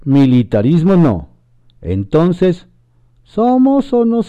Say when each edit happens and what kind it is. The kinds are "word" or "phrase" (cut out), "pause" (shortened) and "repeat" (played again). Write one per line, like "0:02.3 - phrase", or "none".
none